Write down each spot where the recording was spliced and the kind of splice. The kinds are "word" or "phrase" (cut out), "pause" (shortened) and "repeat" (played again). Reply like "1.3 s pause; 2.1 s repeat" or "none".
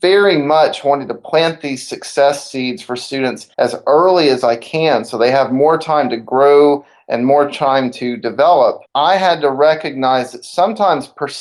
3.5 s pause; 8.9 s pause

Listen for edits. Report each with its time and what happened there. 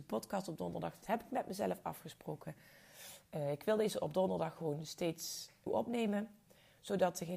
5.7 s word

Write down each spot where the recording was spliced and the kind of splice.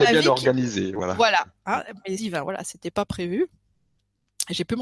2.2 s word

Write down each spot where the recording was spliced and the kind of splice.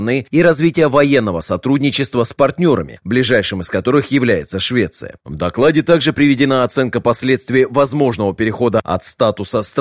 none

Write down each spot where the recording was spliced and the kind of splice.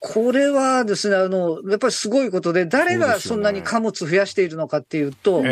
none

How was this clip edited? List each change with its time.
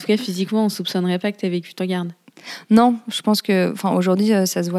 1.8 s phrase

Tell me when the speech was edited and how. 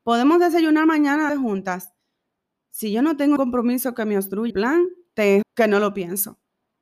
1.3 s word; 3.4 s word; 4.5 s word; 5.4 s word

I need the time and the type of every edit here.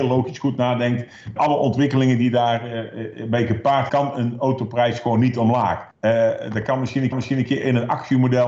1.4 s word; 3.9 s word; 5.9 s pause; 7.1 s repeat

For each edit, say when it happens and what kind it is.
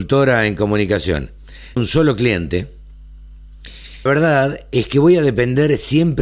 1.8 s word; 4.1 s word

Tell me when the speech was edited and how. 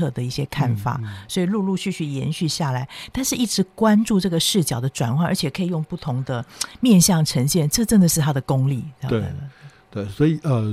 none

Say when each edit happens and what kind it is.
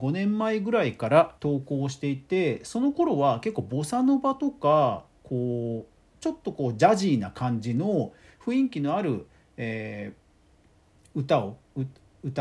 1.4 s pause

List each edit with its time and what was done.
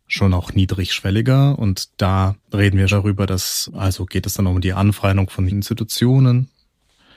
2.4 s pause; 2.9 s word; 3.7 s word; 5.5 s word

